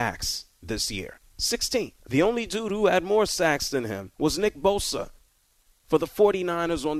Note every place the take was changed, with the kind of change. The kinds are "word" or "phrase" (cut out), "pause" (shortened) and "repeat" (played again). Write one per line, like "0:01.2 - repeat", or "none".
0:02.0 - pause
0:04.1 - pause